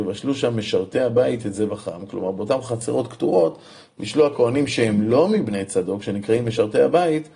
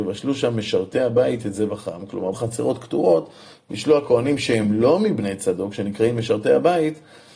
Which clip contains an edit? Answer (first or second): second